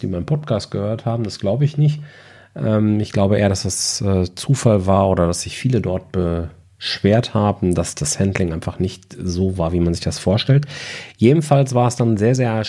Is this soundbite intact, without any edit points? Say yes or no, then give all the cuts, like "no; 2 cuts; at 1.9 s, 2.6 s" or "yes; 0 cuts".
yes; 0 cuts